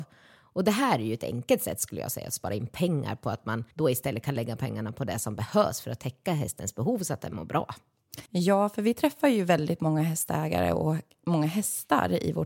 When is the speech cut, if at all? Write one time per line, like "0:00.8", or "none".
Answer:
0:03.7
0:08.3